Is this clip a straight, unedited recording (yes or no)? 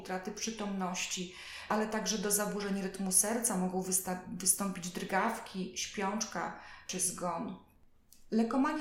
yes